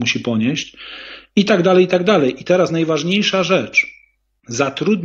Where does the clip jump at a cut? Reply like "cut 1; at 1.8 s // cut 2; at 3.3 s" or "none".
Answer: none